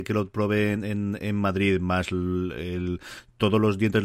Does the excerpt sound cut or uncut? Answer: uncut